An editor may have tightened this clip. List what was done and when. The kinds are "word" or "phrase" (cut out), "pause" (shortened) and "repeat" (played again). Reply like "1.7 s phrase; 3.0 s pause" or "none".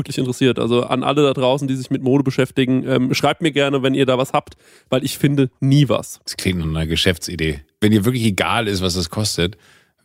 none